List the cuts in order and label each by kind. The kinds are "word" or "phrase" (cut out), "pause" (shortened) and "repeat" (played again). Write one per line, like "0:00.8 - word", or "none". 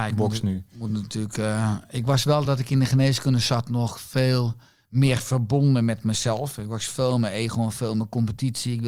none